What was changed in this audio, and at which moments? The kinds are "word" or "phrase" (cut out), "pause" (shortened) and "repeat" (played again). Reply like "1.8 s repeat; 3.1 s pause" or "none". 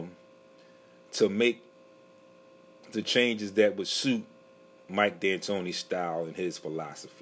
none